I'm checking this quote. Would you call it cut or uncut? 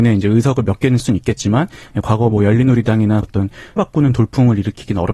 cut